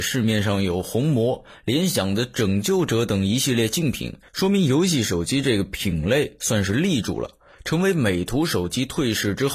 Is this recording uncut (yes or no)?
yes